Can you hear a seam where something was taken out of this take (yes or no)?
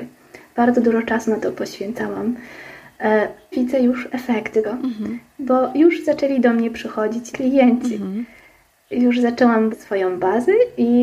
yes